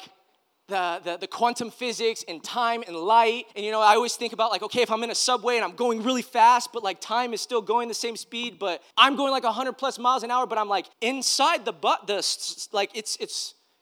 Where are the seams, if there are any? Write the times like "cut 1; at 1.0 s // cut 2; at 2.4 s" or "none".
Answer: cut 1; at 3.5 s // cut 2; at 8.9 s // cut 3; at 10.9 s